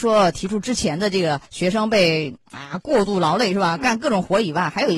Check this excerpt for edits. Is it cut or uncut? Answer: cut